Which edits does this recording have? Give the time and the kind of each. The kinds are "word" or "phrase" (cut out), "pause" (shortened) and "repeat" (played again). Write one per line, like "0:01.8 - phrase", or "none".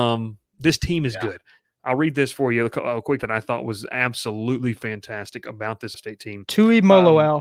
0:03.2 - word
0:05.9 - word